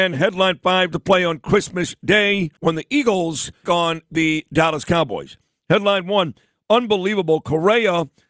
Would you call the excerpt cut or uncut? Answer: cut